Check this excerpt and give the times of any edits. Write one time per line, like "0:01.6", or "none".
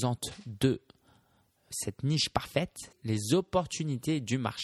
0:01.7
0:02.9